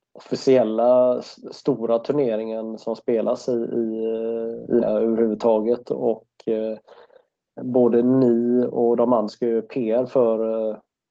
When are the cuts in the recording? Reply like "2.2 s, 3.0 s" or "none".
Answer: 2.8 s, 4.8 s, 7.6 s, 9.3 s